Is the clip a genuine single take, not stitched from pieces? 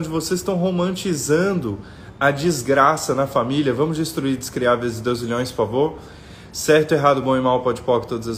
yes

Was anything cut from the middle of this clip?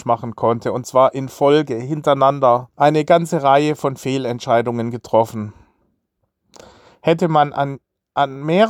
yes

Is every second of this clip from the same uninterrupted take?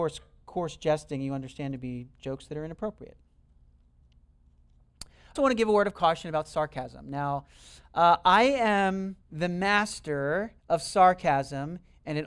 no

